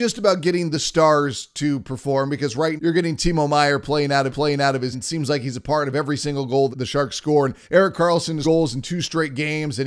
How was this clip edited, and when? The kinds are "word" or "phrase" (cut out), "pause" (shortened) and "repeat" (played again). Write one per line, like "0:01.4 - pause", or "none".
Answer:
0:02.8 - word
0:04.3 - repeat
0:04.9 - word
0:06.7 - word
0:07.6 - pause
0:08.4 - word